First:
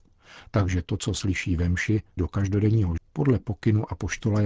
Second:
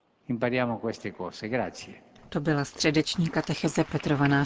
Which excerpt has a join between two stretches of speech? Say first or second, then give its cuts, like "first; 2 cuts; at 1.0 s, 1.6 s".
first; 2 cuts; at 2.2 s, 3.0 s